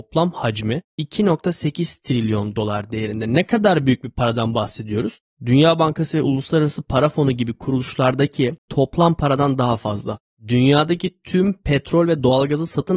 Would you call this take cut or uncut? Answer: uncut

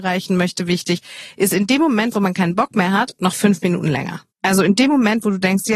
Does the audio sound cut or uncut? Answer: cut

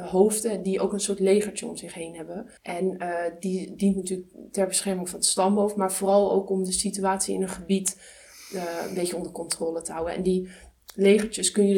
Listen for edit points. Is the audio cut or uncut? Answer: cut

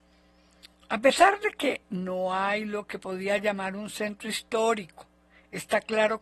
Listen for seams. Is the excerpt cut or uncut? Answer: uncut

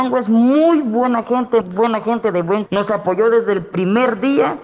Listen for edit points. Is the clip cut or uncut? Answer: cut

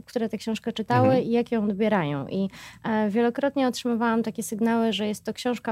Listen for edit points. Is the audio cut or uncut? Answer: uncut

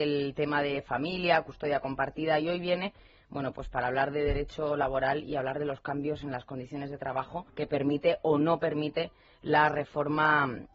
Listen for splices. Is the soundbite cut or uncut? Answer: cut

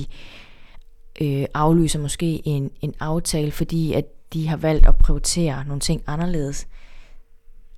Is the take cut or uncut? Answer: uncut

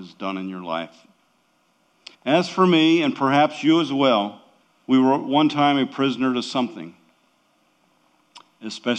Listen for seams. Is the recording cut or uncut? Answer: cut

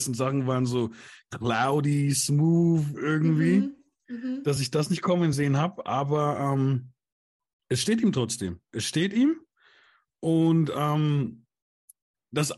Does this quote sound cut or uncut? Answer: uncut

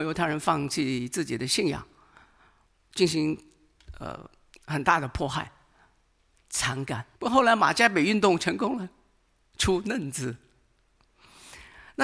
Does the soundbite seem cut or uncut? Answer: cut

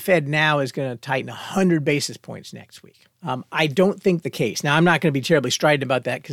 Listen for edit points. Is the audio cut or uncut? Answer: cut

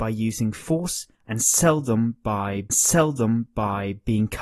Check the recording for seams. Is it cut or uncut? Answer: cut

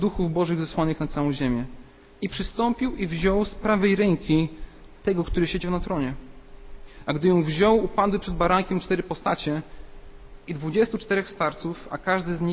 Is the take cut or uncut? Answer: uncut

